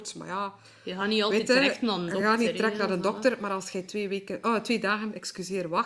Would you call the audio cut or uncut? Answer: uncut